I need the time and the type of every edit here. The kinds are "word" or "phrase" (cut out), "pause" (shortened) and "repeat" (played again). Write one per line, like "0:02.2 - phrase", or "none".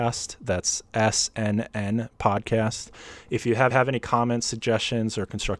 0:03.7 - repeat